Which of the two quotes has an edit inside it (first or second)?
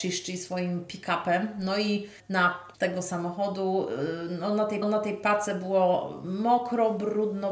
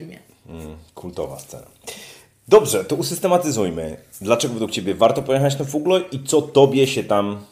first